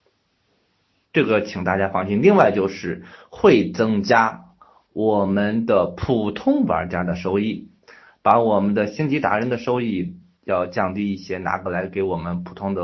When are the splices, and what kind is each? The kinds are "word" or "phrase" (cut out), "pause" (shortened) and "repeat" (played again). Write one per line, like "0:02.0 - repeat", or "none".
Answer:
none

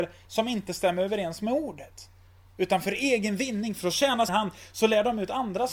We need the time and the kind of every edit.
0:04.3 - phrase

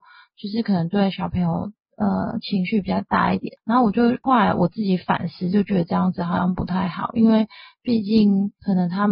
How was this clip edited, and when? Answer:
none

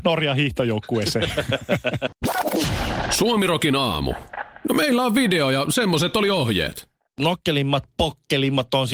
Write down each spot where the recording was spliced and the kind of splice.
none

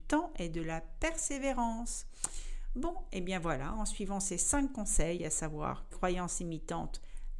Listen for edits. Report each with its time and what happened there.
0:05.9 - phrase

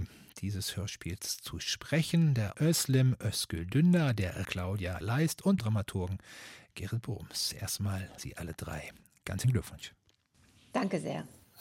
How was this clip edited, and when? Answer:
0:02.5 - word
0:04.4 - word
0:05.0 - word
0:05.6 - word
0:08.2 - word
0:09.4 - word

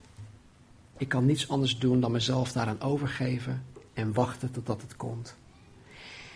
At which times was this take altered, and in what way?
none

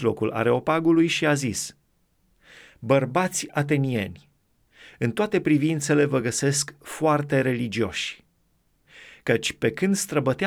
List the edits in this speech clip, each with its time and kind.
none

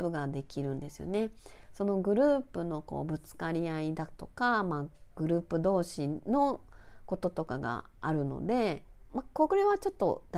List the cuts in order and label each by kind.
none

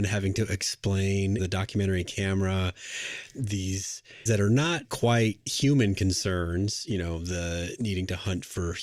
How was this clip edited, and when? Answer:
0:01.4 - phrase
0:04.3 - word
0:04.8 - word

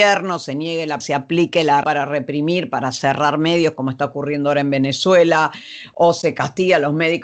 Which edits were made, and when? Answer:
0:01.0 - word
0:01.8 - word

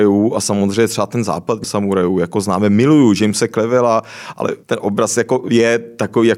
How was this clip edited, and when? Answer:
0:01.6 - word
0:04.6 - pause

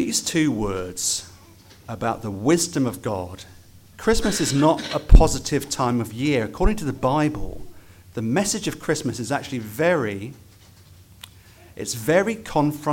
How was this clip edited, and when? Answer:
none

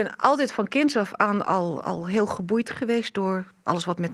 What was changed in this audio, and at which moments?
none

